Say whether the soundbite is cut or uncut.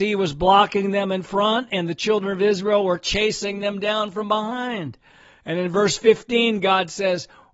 uncut